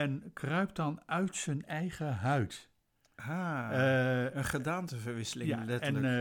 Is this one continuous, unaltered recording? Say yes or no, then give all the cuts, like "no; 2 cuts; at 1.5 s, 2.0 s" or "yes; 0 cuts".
yes; 0 cuts